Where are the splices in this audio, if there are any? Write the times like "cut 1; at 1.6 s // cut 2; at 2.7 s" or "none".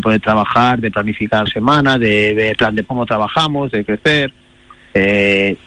cut 1; at 1.5 s // cut 2; at 2.5 s // cut 3; at 2.8 s